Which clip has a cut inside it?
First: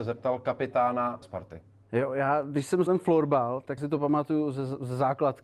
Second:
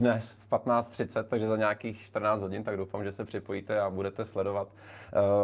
first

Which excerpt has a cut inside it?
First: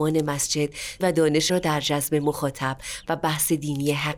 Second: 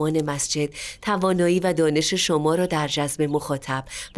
first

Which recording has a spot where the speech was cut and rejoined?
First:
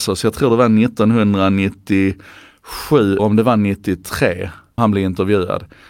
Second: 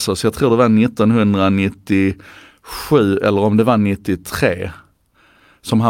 first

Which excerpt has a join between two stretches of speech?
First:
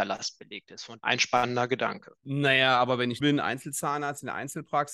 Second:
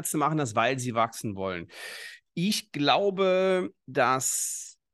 first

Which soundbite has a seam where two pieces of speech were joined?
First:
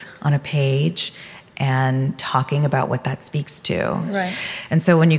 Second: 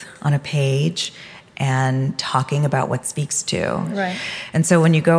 second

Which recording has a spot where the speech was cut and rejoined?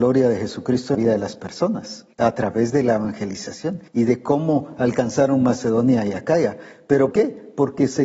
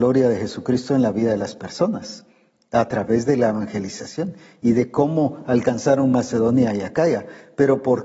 first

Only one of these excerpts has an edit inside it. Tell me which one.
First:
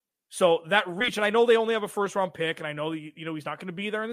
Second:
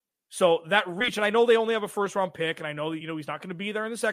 second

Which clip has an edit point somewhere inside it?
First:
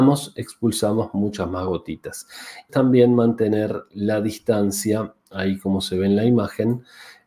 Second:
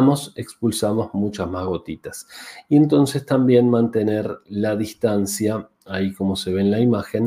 first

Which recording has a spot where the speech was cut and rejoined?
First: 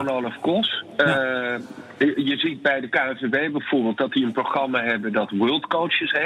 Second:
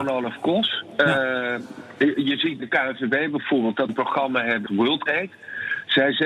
second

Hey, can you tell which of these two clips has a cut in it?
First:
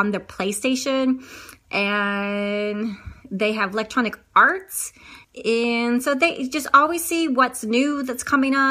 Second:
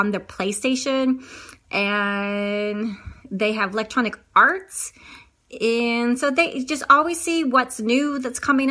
first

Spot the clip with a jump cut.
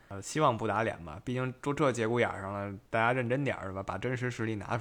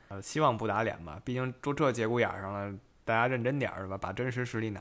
first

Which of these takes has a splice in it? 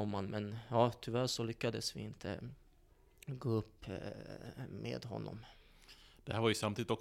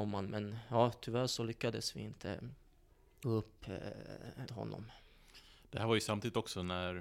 second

